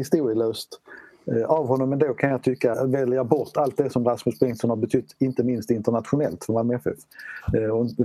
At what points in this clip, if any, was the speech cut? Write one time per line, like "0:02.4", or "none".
0:02.7